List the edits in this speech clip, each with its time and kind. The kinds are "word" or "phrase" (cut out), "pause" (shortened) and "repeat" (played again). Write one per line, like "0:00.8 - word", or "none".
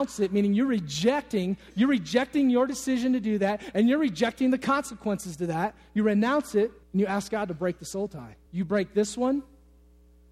0:06.8 - pause
0:08.5 - pause